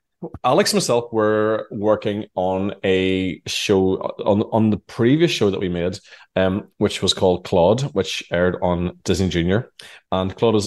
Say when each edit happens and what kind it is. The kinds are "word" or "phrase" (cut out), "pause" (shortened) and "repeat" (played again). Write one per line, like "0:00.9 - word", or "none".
none